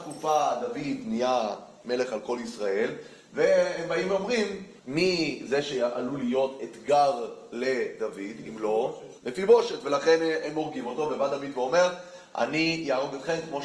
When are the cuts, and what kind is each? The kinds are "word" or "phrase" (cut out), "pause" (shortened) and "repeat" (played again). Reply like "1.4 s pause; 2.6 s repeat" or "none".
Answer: 4.8 s pause; 9.2 s pause